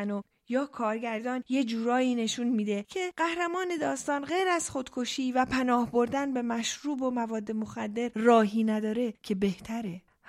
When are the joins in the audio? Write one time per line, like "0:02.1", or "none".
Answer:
none